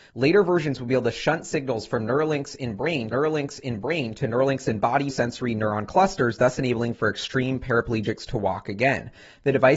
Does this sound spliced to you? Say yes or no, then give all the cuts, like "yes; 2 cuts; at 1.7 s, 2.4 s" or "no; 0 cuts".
yes; 2 cuts; at 3.1 s, 5.1 s